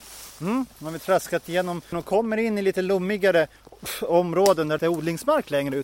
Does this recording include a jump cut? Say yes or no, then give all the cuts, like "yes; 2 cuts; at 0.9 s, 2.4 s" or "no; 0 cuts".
yes; 2 cuts; at 1.9 s, 4.8 s